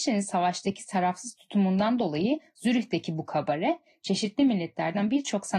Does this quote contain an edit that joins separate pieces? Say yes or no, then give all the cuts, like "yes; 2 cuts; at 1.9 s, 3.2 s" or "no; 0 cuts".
no; 0 cuts